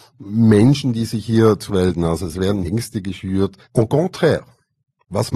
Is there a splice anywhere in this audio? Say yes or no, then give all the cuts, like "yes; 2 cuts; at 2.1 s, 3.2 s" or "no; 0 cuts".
yes; 3 cuts; at 1.7 s, 2.6 s, 3.6 s